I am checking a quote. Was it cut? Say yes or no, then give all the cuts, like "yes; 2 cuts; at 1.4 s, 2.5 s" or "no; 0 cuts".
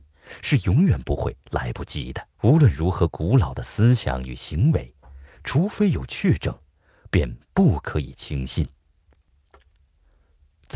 yes; 1 cut; at 2.3 s